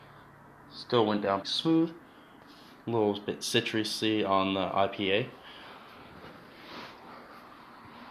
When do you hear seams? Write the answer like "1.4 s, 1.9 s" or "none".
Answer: 1.4 s